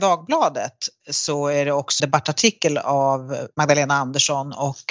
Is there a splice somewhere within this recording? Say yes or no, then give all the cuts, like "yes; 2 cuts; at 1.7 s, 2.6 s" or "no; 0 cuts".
yes; 1 cut; at 2.0 s